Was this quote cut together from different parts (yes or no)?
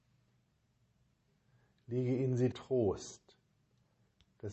yes